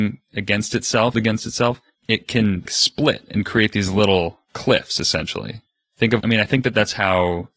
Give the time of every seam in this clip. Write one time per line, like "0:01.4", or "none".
0:01.1
0:02.7
0:06.2